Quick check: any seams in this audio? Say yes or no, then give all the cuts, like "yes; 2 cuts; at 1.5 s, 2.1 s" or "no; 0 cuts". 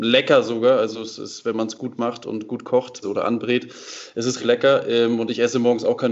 yes; 2 cuts; at 3.0 s, 4.4 s